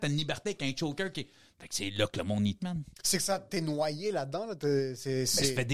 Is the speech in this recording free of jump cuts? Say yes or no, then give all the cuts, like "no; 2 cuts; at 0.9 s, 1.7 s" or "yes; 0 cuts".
no; 2 cuts; at 2.6 s, 2.9 s